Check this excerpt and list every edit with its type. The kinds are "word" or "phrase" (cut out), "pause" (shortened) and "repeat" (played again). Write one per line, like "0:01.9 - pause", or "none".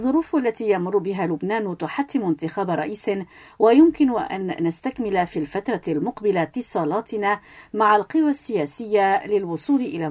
none